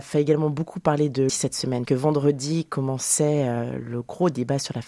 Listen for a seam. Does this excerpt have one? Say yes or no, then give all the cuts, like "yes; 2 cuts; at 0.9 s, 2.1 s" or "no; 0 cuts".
yes; 2 cuts; at 1.3 s, 1.8 s